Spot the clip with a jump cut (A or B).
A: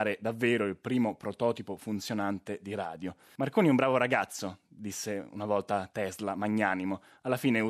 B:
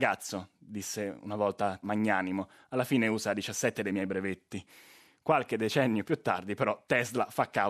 B